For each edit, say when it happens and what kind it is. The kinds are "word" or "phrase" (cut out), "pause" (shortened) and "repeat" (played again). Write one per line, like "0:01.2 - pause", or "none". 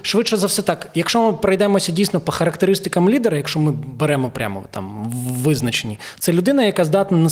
none